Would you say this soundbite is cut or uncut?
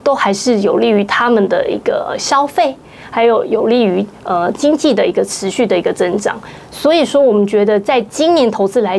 uncut